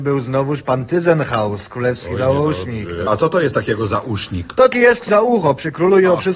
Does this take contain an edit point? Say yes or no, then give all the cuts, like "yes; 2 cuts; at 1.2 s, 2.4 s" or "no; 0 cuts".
yes; 3 cuts; at 3.1 s, 4.7 s, 5.1 s